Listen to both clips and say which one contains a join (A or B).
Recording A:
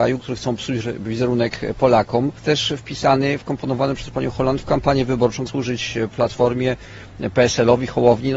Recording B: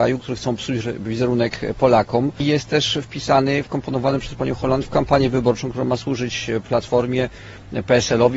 A